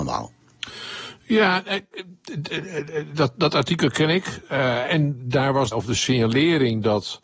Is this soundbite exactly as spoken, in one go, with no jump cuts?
no; 2 cuts; at 4.9 s, 5.7 s

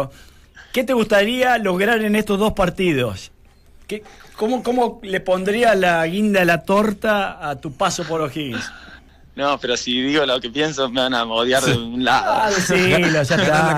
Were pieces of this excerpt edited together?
no; 0 cuts

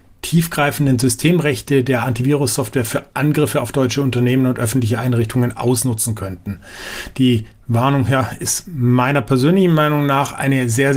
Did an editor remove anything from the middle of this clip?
no; 0 cuts

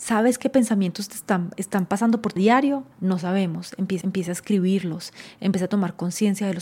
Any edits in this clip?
yes; 3 cuts; at 2.4 s, 2.9 s, 4.0 s

